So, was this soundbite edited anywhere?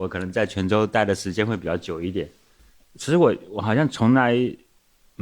no; 0 cuts

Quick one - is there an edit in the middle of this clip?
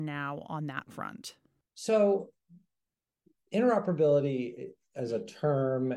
no; 0 cuts

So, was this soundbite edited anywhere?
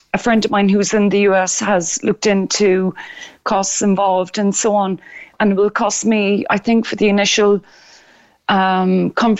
no; 0 cuts

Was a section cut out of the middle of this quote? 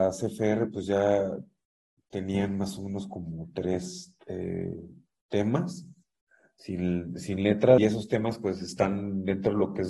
yes; 2 cuts; at 4.2 s, 7.8 s

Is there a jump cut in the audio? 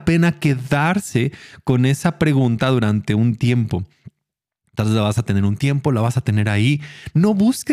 no; 0 cuts

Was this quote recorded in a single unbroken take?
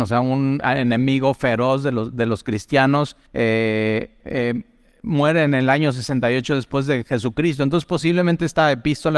no; 1 cut; at 3.3 s

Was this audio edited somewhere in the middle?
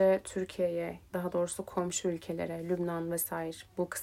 yes; 1 cut; at 1.1 s

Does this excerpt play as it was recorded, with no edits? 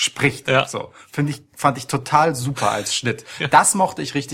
yes; 0 cuts

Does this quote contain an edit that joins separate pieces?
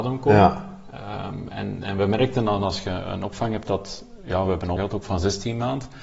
yes; 1 cut; at 4.8 s

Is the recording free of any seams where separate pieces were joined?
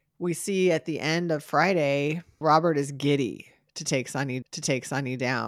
no; 1 cut; at 4.4 s

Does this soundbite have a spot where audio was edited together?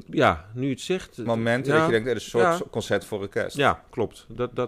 yes; 1 cut; at 1.3 s

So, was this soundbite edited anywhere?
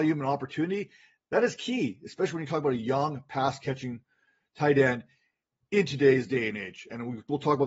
no; 0 cuts

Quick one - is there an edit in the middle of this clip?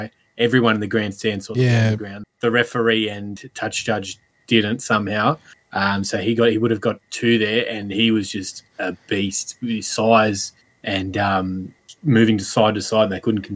no; 0 cuts

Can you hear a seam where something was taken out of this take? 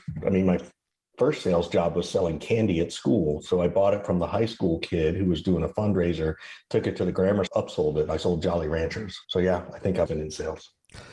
yes; 3 cuts; at 7.5 s, 9.2 s, 10.1 s

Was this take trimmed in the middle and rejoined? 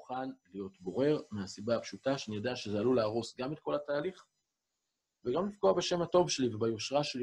no; 0 cuts

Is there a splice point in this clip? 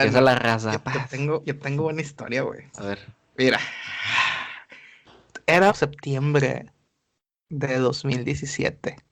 yes; 2 cuts; at 2.7 s, 5.7 s

